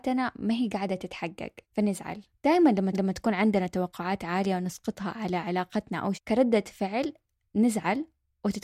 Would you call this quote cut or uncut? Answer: cut